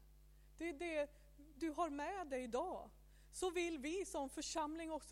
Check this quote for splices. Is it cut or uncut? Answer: uncut